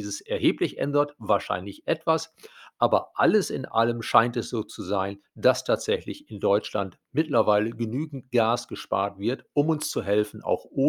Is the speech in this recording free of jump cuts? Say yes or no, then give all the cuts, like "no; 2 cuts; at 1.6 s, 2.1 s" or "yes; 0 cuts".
yes; 0 cuts